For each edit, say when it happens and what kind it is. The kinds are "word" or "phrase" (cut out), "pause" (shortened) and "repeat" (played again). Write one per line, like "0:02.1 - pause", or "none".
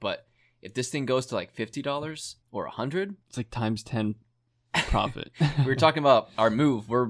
0:02.4 - pause
0:03.2 - pause

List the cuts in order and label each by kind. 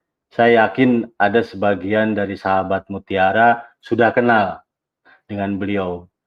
none

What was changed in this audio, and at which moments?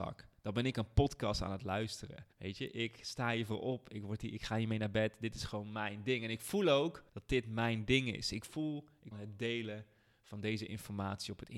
0:02.3 - pause
0:07.1 - pause
0:09.1 - phrase

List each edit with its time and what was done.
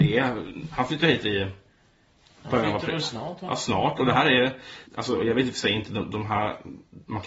0:04.9 - pause

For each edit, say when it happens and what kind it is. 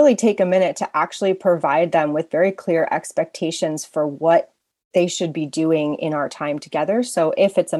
none

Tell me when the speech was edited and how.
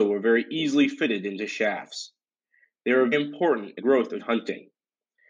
0:03.1 - word
0:03.8 - word
0:04.2 - word

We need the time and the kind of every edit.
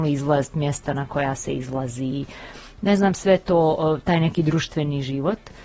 none

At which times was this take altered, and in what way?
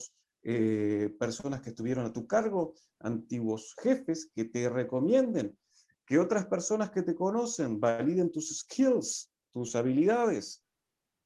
none

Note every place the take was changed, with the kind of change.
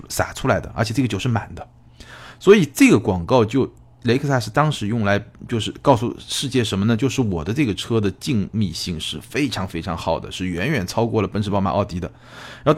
none

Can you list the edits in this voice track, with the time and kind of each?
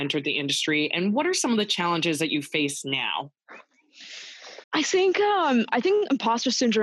0:04.6 - pause

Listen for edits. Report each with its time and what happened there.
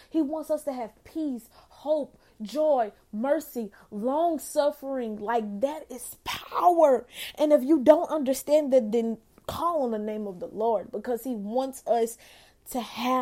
none

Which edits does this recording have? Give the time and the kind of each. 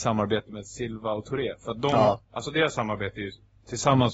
0:02.2 - pause

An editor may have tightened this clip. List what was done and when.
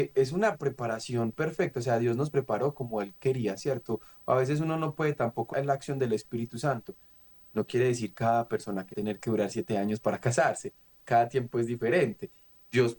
0:05.5 - word
0:08.1 - word
0:08.9 - phrase

